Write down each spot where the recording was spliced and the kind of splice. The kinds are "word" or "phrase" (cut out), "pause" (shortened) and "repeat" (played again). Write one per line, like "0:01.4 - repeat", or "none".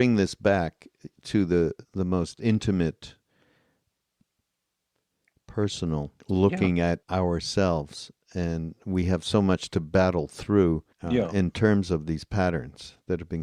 0:01.8 - pause
0:06.2 - pause
0:07.0 - pause
0:10.9 - pause